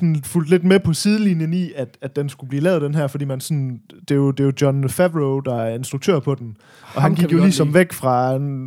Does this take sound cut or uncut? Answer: uncut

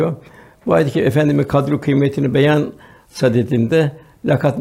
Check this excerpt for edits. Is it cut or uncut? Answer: uncut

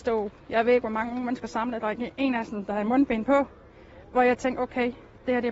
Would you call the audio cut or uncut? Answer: uncut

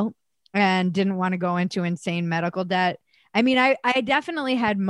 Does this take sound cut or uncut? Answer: uncut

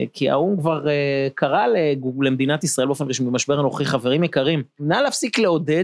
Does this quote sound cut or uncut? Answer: uncut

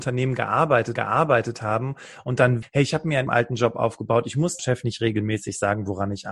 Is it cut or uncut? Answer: cut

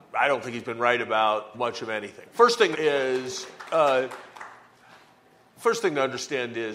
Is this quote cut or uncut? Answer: cut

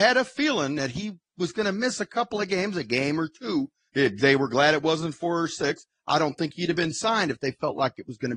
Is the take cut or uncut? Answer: uncut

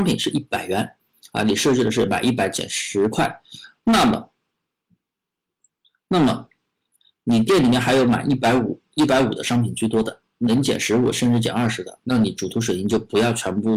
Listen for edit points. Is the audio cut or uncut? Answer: uncut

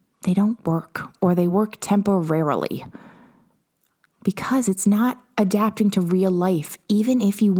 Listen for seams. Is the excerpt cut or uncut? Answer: uncut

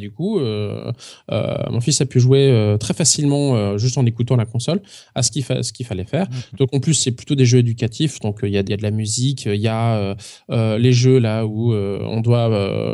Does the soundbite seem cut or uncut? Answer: cut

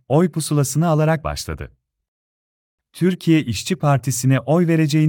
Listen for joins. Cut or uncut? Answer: cut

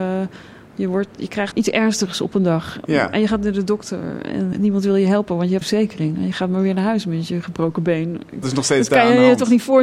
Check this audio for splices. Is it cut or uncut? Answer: cut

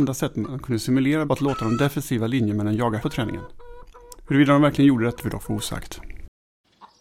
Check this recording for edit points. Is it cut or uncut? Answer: cut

